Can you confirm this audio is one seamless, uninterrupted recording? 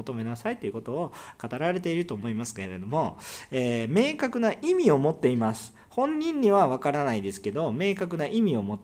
yes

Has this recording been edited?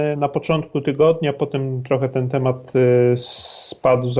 no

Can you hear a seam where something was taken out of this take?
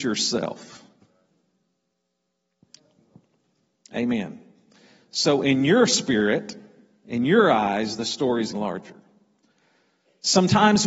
yes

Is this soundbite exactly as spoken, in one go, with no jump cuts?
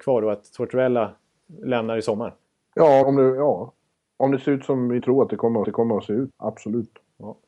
no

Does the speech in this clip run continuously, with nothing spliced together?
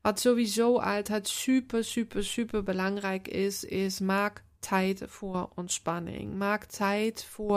yes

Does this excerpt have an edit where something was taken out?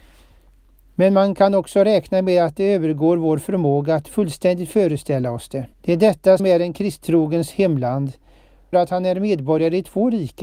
yes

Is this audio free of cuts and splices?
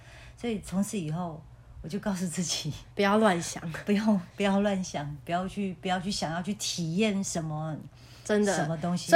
no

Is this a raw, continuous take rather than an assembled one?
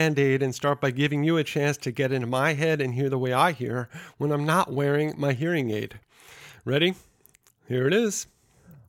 yes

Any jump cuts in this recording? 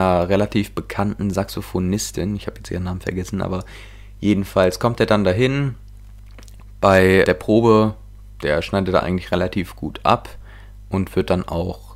yes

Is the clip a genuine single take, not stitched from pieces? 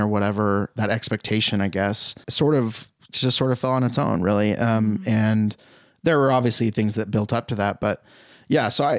no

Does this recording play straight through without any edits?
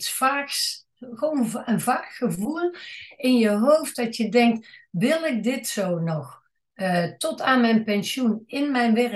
yes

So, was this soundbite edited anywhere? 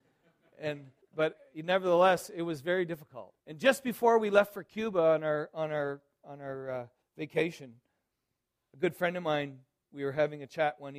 yes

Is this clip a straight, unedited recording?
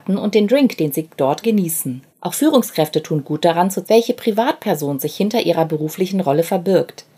no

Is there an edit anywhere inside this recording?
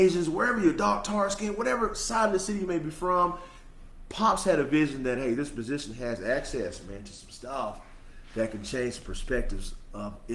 no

